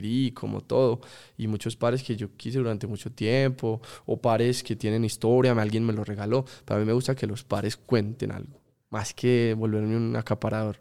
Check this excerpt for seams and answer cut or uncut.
uncut